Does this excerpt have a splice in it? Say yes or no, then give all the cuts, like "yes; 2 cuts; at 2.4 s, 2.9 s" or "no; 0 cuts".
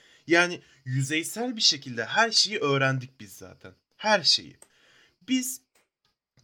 no; 0 cuts